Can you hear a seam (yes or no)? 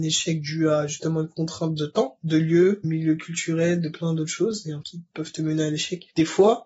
yes